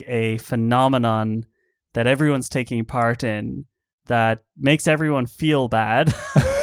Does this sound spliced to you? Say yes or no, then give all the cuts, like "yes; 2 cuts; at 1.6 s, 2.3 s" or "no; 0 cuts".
no; 0 cuts